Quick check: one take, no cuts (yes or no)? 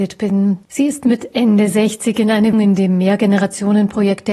no